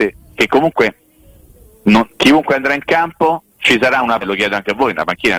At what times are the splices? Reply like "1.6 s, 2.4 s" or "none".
2.1 s, 3.5 s, 4.2 s

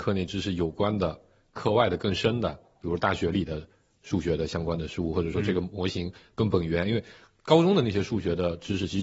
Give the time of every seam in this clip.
none

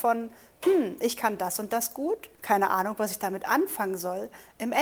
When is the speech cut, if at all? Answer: 2.3 s

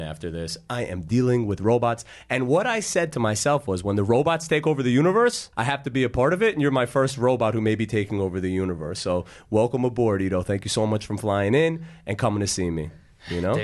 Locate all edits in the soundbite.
5.5 s

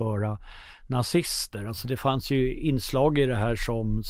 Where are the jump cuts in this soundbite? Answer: none

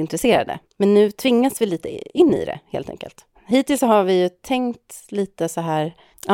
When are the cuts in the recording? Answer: none

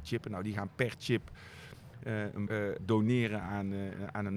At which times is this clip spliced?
2.5 s, 2.8 s

